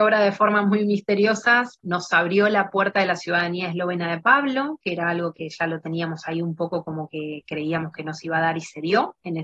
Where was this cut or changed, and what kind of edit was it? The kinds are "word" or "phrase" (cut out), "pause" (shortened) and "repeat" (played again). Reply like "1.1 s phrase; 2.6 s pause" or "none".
1.8 s word